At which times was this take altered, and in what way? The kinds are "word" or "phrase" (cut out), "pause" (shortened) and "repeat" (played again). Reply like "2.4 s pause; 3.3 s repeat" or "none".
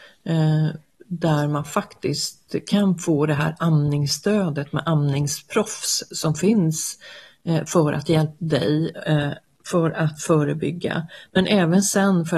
8.4 s word

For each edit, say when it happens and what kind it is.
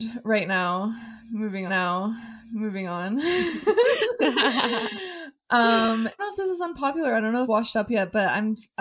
1.7 s repeat; 6.2 s phrase; 7.4 s phrase

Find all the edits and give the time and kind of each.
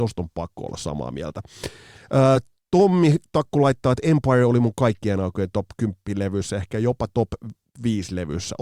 none

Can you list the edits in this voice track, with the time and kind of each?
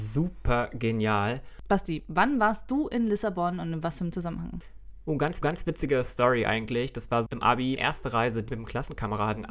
5.4 s repeat; 7.3 s word; 7.8 s word; 8.5 s word

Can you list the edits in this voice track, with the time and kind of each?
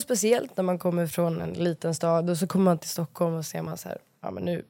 none

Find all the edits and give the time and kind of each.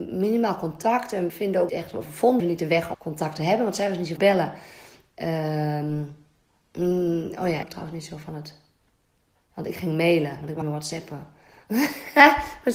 1.3 s word; 1.7 s word; 2.4 s word; 2.9 s word; 4.2 s word; 7.6 s word; 10.6 s word

